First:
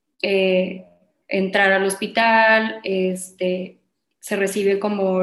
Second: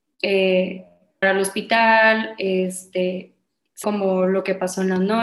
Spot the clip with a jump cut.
second; 2 cuts; at 1.2 s, 3.8 s

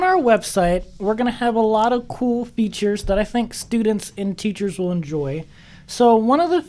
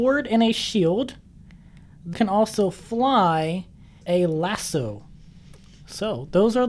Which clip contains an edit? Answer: second; 2 cuts; at 2.1 s, 4.0 s

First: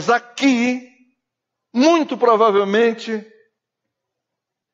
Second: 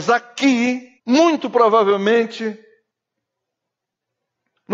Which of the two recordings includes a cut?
second; 1 cut; at 1.0 s

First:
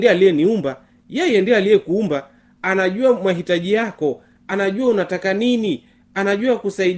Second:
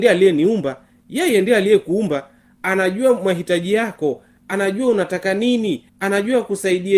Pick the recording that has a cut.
second; 1 cut; at 5.9 s

